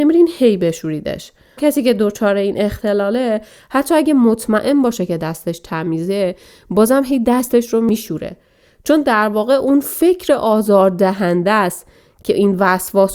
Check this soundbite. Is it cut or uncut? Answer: cut